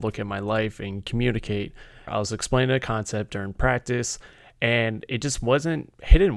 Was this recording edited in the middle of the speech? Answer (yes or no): no